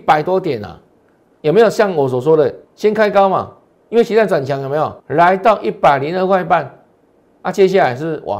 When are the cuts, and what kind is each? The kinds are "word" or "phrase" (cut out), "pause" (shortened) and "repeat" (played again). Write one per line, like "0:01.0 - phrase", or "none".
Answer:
0:01.4 - phrase
0:02.6 - pause
0:03.7 - pause
0:05.0 - pause